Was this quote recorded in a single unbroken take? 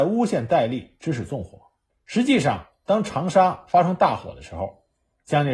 no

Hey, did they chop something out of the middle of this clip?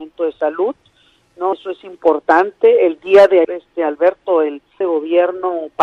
yes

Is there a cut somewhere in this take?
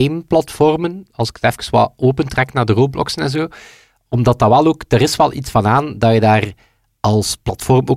no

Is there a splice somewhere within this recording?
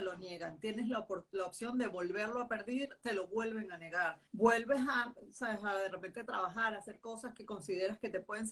yes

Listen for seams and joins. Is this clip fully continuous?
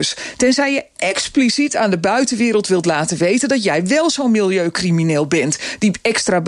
yes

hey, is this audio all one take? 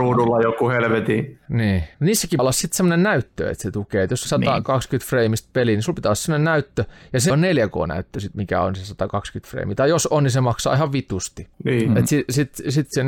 no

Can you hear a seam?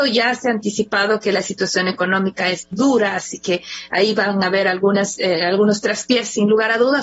yes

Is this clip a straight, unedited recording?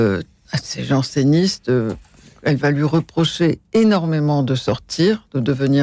yes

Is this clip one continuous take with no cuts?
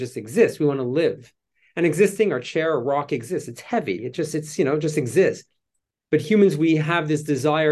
yes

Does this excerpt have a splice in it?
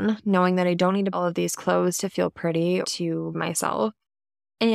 yes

